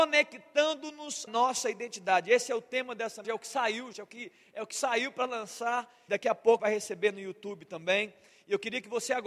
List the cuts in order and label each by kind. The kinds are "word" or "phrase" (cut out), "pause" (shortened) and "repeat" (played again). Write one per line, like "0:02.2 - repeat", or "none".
0:01.3 - word
0:03.2 - word
0:03.9 - word
0:06.1 - word
0:06.6 - word